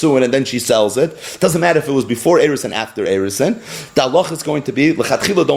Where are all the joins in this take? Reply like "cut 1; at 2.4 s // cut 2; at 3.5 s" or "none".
none